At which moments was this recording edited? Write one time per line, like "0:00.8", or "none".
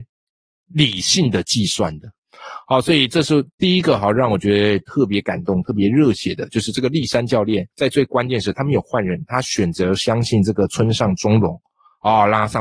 0:07.7